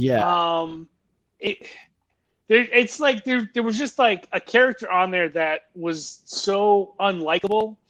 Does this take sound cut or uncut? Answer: uncut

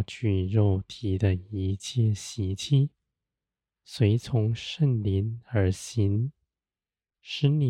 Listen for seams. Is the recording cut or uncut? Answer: uncut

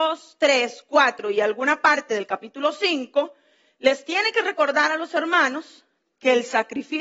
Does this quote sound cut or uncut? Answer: uncut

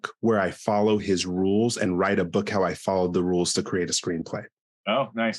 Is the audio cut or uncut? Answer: uncut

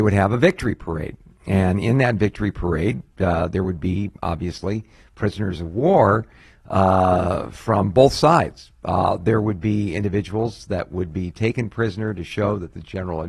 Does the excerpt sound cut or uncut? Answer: uncut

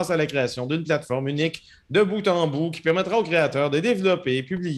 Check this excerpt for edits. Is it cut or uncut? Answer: uncut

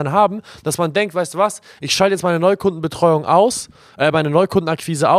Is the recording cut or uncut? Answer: uncut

